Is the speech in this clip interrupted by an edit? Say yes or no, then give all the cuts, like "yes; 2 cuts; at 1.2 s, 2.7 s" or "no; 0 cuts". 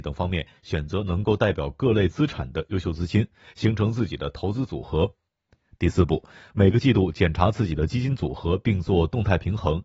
no; 0 cuts